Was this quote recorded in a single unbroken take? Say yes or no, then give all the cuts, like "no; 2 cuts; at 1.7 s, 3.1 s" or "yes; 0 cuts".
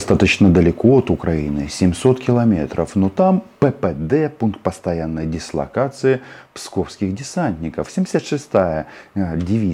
yes; 0 cuts